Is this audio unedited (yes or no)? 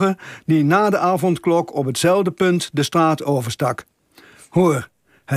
yes